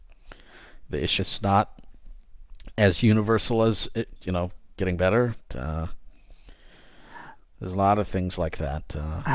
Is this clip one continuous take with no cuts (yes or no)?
no